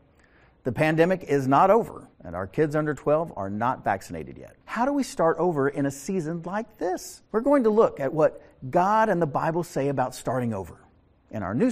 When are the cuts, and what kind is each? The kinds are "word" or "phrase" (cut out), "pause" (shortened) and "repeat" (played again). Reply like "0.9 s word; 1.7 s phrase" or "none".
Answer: 2.1 s pause; 4.6 s pause; 7.3 s pause

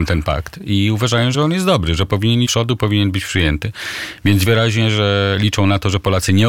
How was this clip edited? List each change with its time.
1.3 s word; 2.4 s phrase; 4.4 s word

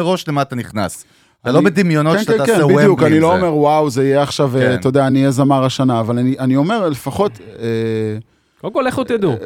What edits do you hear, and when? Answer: none

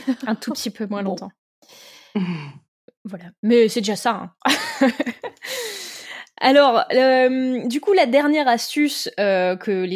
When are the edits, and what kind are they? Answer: none

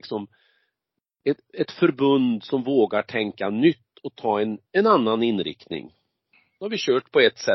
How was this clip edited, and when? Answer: 4.6 s pause

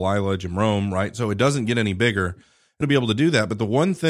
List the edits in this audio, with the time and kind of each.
2.8 s word

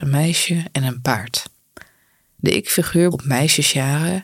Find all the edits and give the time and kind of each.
3.1 s phrase

